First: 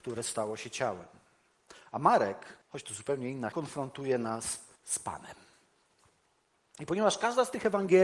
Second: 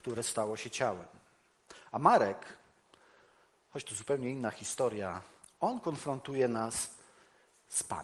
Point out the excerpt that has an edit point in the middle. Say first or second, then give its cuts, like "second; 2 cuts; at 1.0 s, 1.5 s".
first; 3 cuts; at 2.6 s, 3.5 s, 4.8 s